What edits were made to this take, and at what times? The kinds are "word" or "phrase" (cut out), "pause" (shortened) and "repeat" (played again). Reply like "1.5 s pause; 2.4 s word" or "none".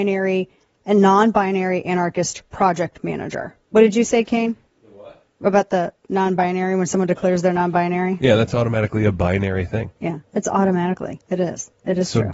3.6 s pause; 4.7 s pause